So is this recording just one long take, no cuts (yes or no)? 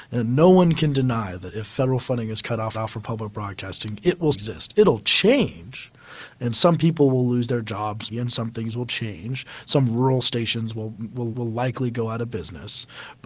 no